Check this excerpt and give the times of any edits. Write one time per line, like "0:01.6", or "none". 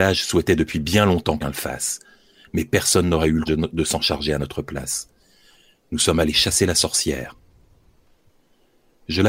0:01.4
0:03.5